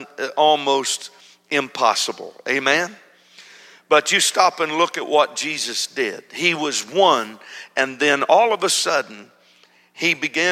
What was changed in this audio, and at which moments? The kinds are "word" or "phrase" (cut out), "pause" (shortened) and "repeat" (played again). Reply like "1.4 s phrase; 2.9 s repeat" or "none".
none